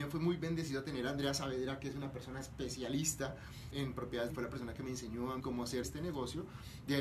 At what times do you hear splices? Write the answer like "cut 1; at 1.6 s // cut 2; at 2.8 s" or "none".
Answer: cut 1; at 3.7 s // cut 2; at 4.3 s // cut 3; at 5.4 s // cut 4; at 5.8 s